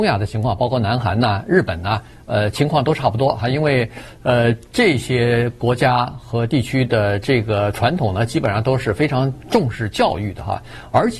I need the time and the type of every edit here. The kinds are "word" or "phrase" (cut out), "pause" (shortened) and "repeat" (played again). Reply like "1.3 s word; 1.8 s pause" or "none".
none